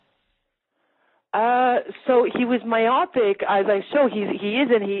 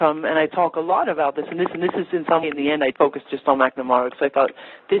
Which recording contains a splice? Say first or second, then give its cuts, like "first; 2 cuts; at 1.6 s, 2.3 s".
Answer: second; 3 cuts; at 1.7 s, 2.4 s, 2.9 s